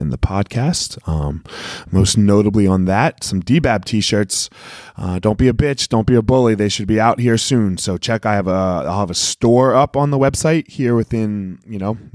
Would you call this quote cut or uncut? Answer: uncut